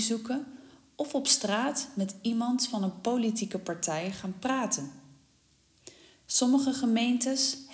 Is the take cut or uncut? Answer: uncut